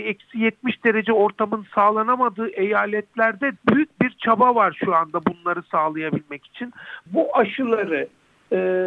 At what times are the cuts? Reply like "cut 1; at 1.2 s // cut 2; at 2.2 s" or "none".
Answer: cut 1; at 3.6 s